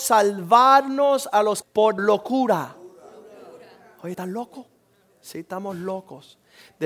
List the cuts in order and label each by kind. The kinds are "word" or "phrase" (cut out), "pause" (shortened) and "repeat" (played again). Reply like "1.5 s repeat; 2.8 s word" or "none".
1.6 s word; 2.0 s phrase; 4.1 s phrase